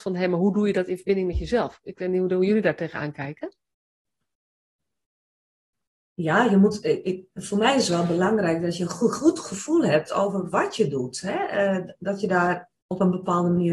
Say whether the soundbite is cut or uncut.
uncut